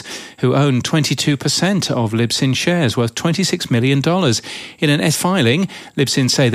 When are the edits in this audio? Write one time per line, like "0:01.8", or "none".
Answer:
0:05.1